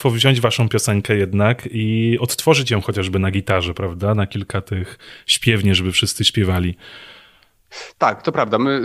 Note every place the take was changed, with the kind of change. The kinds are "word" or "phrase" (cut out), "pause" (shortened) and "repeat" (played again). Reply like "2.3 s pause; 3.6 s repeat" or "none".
none